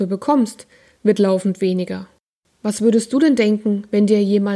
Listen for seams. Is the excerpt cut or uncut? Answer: uncut